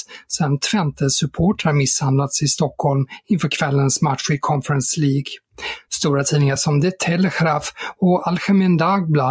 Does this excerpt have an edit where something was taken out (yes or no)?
no